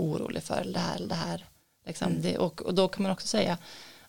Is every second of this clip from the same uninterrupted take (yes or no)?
yes